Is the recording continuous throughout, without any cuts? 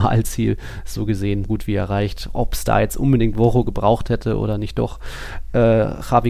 no; 1 cut; at 1.4 s

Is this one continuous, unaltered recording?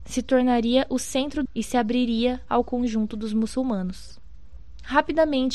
no; 1 cut; at 1.5 s

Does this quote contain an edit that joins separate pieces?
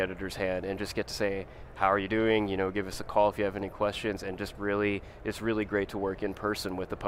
no; 0 cuts

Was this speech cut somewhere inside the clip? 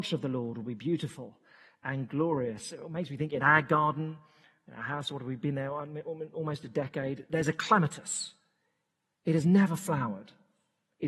no; 0 cuts

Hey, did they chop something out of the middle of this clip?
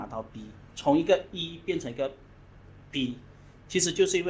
no; 0 cuts

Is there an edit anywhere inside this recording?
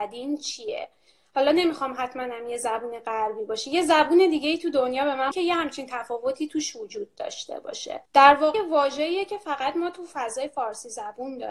yes; 3 cuts; at 5.3 s, 8.1 s, 8.5 s

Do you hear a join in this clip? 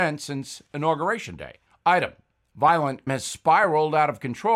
yes; 2 cuts; at 1.7 s, 3.1 s

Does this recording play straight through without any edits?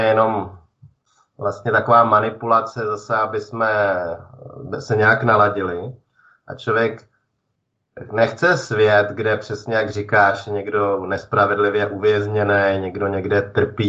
yes; 0 cuts

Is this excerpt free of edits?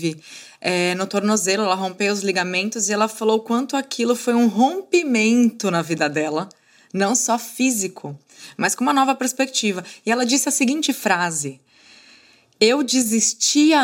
yes; 0 cuts

